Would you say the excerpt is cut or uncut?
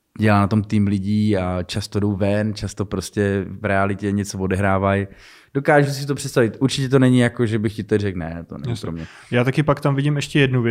uncut